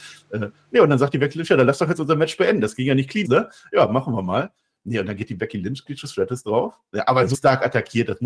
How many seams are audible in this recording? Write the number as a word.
three